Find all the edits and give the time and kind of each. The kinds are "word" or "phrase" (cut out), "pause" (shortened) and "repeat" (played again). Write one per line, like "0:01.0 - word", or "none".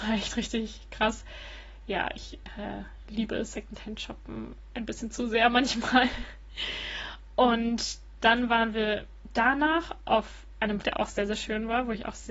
0:10.8 - word